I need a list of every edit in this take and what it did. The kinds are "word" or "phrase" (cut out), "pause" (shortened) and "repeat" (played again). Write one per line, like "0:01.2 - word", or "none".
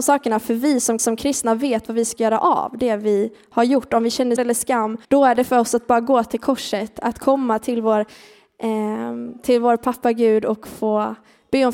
0:01.0 - repeat
0:04.4 - word
0:05.0 - pause